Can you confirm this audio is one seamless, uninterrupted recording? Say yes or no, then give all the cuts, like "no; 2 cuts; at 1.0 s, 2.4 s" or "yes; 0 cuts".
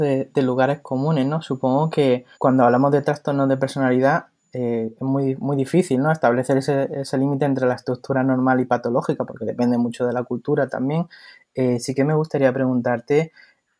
no; 1 cut; at 2.3 s